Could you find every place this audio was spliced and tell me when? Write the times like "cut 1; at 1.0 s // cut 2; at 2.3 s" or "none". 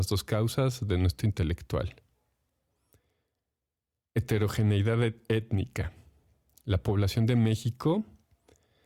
cut 1; at 1.2 s